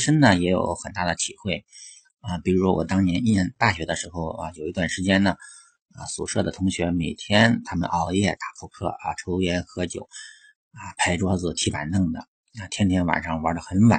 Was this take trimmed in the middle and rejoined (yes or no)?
no